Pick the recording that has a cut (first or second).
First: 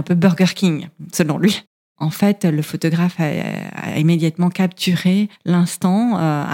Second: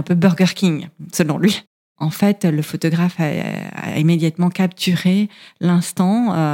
first